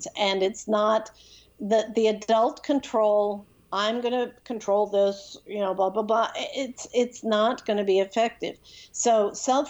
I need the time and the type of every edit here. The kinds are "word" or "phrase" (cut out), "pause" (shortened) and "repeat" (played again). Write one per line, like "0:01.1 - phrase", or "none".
none